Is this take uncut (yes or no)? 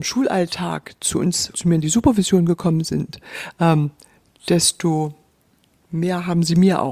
no